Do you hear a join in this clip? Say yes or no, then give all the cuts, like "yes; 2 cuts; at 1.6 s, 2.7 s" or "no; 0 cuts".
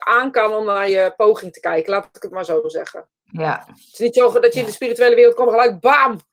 no; 0 cuts